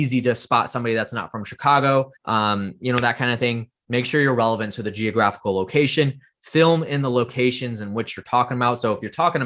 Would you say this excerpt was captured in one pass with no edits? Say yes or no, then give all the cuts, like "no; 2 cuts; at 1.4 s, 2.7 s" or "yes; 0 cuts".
no; 1 cut; at 2.2 s